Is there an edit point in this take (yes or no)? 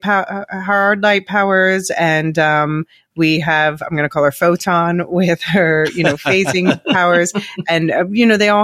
no